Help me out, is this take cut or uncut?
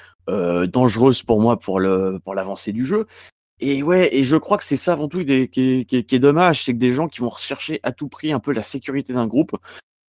uncut